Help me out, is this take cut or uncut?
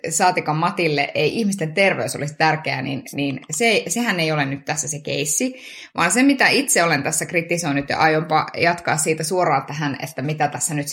uncut